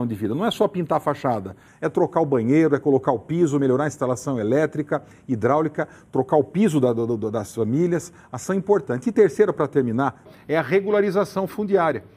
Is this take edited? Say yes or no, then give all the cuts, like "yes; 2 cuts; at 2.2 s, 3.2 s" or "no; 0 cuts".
no; 0 cuts